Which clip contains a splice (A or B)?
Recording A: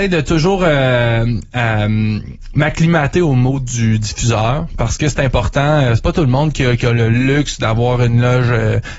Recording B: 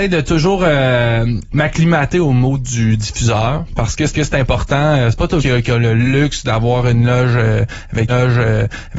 B